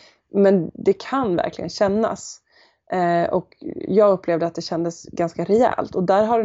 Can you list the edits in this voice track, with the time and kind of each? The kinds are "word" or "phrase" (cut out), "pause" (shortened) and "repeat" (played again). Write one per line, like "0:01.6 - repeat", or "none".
none